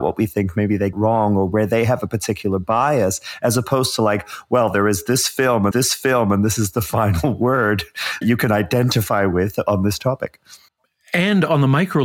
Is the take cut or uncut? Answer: cut